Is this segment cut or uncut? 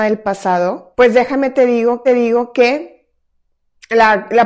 cut